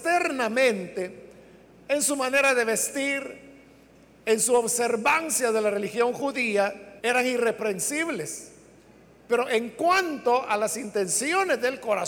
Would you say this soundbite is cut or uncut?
cut